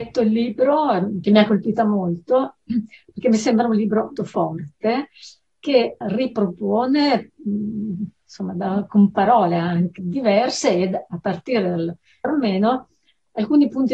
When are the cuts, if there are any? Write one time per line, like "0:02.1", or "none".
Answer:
0:04.2
0:06.0
0:10.0
0:12.2